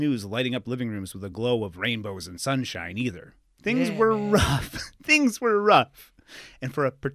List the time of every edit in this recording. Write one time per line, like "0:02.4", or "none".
none